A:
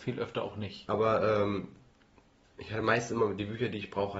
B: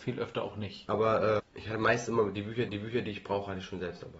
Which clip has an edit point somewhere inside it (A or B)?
B